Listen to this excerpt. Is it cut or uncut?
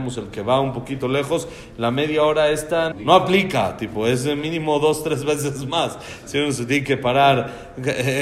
cut